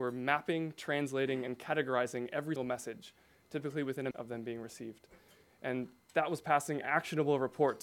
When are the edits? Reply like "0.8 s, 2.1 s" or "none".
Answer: 2.6 s, 4.1 s